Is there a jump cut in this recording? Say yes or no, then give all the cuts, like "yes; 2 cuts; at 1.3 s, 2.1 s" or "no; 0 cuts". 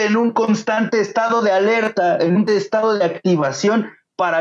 yes; 1 cut; at 2.5 s